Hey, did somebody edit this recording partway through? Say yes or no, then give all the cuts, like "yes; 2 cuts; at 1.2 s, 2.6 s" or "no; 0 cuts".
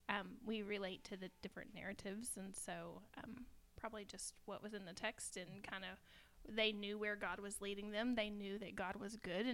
no; 0 cuts